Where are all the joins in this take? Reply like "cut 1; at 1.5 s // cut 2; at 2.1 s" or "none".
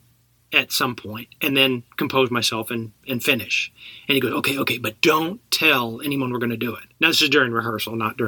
cut 1; at 1.9 s // cut 2; at 6.9 s